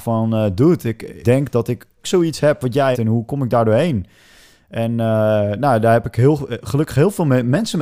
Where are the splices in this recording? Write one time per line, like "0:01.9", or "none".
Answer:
0:01.2
0:02.0
0:02.9